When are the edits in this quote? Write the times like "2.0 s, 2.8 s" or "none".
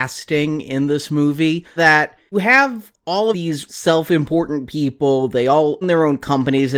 1.8 s, 2.3 s, 3.3 s, 3.7 s, 5.8 s